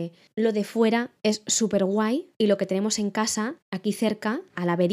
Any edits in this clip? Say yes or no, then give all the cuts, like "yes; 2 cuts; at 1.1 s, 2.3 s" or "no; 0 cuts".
yes; 1 cut; at 3.6 s